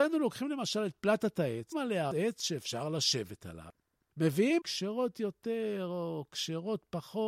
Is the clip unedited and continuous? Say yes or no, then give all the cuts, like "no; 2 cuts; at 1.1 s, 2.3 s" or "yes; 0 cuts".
no; 3 cuts; at 1.7 s, 2.1 s, 4.6 s